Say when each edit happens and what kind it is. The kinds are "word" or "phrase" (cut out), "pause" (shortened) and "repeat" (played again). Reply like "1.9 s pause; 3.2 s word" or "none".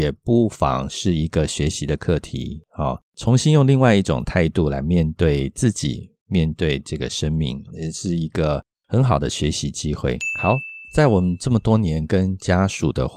7.7 s word